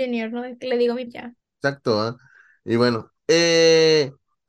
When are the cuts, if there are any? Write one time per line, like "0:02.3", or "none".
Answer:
0:01.1
0:01.4
0:03.2